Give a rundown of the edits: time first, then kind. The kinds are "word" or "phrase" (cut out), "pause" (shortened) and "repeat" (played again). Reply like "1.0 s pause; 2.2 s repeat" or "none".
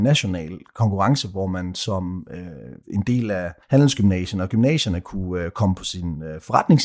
2.8 s pause; 3.6 s pause